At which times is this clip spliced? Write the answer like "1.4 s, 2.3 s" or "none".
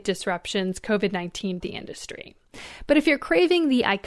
1.6 s

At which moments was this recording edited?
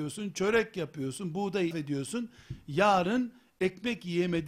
1.7 s

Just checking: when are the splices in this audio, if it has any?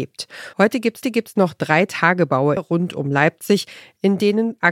1.0 s, 2.6 s

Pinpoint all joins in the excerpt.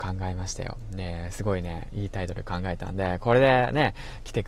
none

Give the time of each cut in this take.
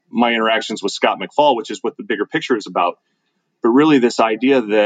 none

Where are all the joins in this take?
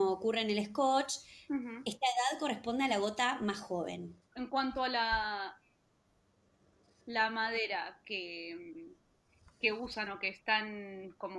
none

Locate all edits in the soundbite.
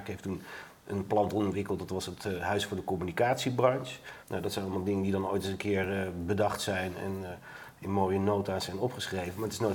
4.2 s

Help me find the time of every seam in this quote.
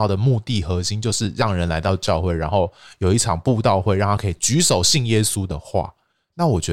none

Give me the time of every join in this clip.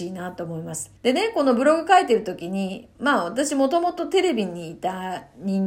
1.0 s

